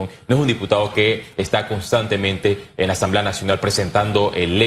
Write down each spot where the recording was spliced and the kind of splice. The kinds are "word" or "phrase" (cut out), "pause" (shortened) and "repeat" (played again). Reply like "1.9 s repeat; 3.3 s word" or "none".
none